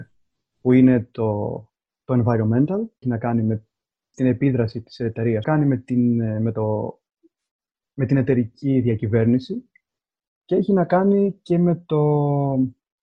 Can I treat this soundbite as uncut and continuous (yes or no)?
no